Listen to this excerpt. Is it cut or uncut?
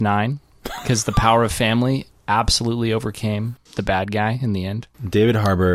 uncut